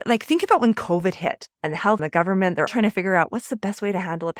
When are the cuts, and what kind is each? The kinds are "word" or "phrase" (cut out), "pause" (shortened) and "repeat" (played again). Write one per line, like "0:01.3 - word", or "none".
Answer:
0:01.5 - pause
0:02.0 - phrase
0:02.7 - word

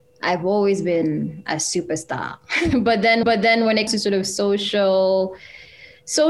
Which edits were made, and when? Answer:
0:03.2 - repeat
0:03.9 - word

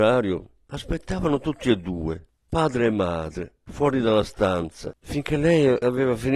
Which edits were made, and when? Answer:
0:05.0 - pause

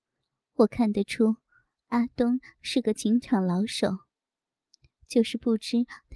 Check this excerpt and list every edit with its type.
none

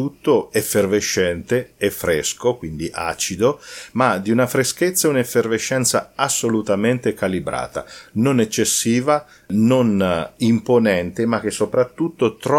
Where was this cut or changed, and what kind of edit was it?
none

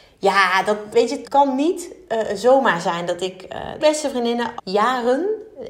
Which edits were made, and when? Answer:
0:00.9 - word
0:01.2 - word
0:03.8 - phrase
0:04.6 - word

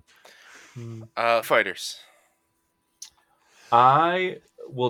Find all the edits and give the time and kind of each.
0:01.4 - word

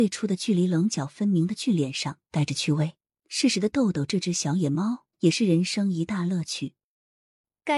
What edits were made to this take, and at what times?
0:03.1 - pause
0:05.1 - pause

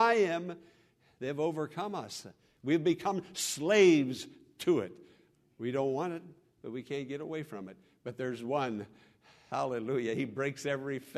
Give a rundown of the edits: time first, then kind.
none

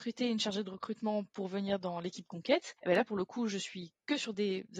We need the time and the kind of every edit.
0:02.8 - pause

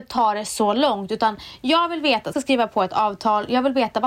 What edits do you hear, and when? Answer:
0:02.3 - phrase

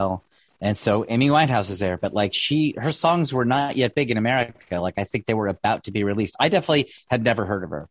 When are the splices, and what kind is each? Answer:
none

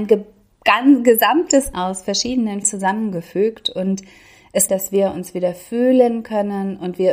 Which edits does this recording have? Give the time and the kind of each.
0:01.7 - phrase
0:02.6 - word
0:04.7 - phrase

